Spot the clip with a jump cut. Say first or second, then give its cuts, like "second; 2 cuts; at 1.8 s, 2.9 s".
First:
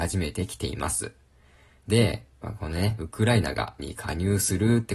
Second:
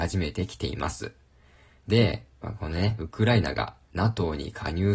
first; 1 cut; at 3.8 s